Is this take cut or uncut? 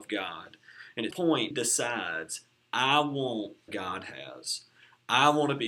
cut